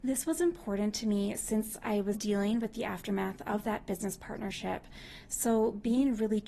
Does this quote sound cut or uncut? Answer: cut